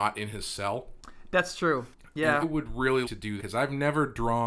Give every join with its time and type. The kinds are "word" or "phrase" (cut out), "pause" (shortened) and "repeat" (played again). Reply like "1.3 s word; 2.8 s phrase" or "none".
2.4 s word; 3.0 s word; 3.4 s word